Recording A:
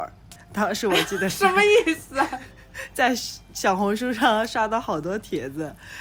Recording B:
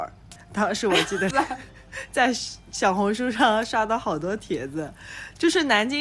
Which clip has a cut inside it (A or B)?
B